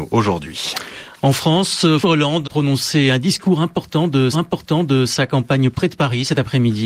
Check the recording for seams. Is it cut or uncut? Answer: cut